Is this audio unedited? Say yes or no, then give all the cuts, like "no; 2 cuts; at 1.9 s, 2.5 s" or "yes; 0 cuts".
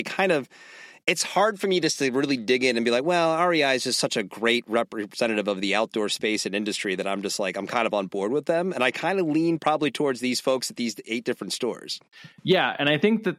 yes; 0 cuts